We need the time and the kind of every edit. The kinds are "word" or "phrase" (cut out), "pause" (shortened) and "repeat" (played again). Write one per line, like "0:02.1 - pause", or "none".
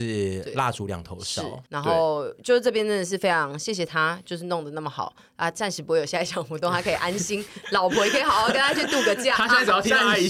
0:01.7 - pause

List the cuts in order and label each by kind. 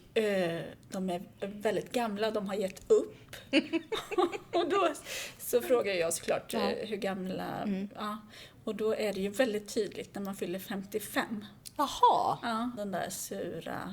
0:12.8 - phrase

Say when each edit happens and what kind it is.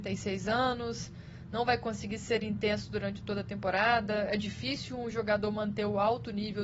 none

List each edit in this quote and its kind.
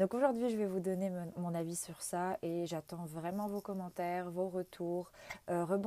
none

